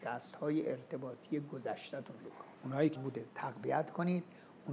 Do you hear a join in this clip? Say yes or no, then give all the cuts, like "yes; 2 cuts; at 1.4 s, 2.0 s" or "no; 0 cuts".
yes; 3 cuts; at 2.2 s, 2.6 s, 3.0 s